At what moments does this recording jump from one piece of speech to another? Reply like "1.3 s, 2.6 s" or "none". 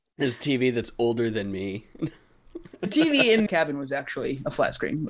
3.5 s